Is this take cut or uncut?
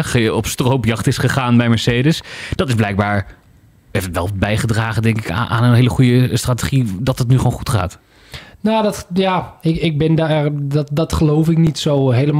uncut